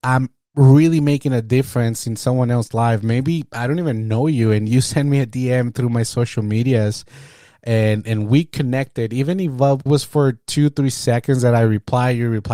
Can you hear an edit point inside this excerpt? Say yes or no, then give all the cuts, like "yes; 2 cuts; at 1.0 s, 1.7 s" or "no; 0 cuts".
yes; 1 cut; at 9.9 s